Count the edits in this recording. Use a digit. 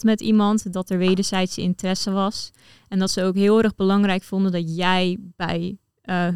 0